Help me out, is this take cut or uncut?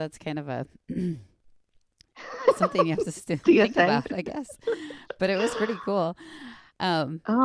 uncut